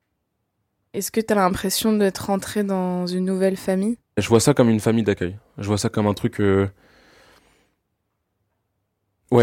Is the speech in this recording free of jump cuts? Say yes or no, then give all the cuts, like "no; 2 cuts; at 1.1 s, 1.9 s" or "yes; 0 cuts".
no; 1 cut; at 4.1 s